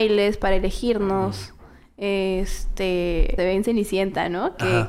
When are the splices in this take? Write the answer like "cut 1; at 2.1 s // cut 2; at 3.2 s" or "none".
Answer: cut 1; at 3.4 s